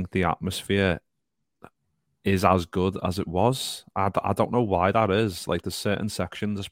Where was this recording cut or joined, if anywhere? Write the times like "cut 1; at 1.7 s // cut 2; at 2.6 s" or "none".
none